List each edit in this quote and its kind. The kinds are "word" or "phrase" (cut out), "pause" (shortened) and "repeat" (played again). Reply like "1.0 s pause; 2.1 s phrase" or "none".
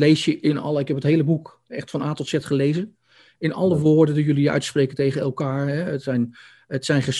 none

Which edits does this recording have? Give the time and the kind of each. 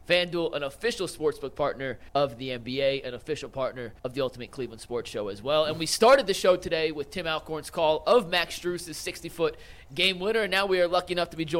2.1 s pause; 4.0 s pause

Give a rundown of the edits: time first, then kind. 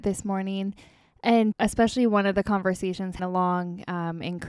1.5 s word; 3.2 s word

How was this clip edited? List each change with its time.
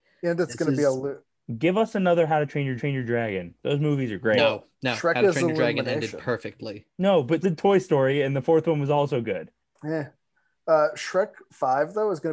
2.8 s repeat; 4.7 s pause; 7.4 s word; 9.6 s pause

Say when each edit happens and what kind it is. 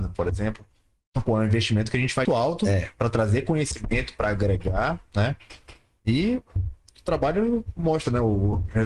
2.2 s word

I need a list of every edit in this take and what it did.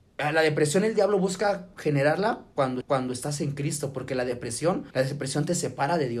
2.8 s repeat; 4.9 s pause

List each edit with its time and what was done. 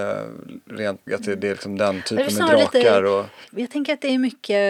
1.1 s word

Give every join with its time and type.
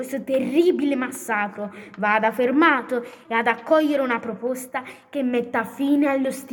3.2 s phrase

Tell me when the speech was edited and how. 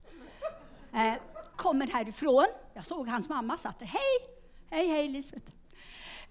1.5 s word

